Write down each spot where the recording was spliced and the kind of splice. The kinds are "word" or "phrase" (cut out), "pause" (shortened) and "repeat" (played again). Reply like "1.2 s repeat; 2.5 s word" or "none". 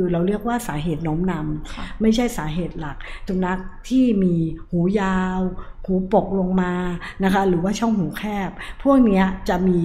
3.3 s phrase